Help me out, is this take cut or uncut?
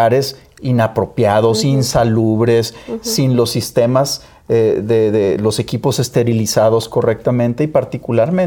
uncut